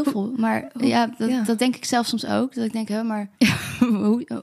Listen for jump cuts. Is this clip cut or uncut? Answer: cut